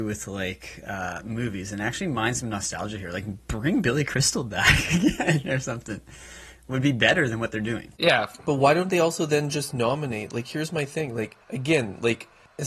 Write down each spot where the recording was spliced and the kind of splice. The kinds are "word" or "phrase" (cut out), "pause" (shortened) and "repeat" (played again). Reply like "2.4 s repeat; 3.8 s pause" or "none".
7.9 s pause; 11.4 s pause